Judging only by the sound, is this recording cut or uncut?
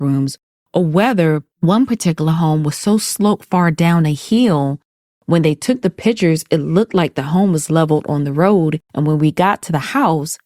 cut